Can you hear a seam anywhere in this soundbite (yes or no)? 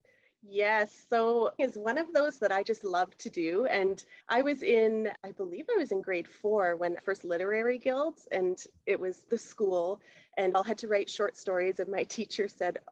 yes